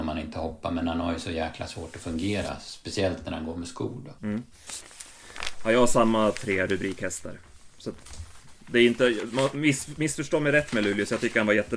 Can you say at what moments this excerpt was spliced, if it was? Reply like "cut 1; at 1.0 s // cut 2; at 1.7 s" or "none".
cut 1; at 4.2 s